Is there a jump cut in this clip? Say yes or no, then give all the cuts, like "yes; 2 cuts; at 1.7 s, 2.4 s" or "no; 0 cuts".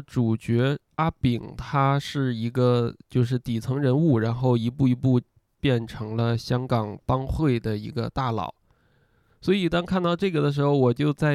no; 0 cuts